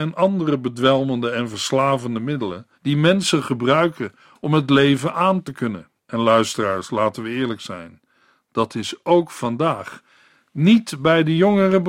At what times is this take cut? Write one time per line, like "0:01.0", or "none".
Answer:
0:02.7
0:06.0